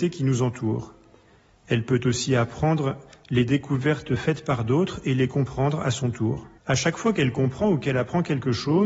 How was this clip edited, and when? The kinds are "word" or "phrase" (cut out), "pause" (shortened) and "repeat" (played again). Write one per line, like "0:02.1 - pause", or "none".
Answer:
0:06.6 - pause